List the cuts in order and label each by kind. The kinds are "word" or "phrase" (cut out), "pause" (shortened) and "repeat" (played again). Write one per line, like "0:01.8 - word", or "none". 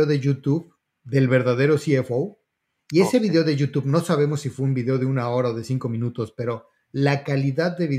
none